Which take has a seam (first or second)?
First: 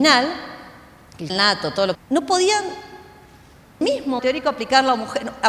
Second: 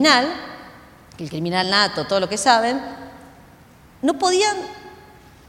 first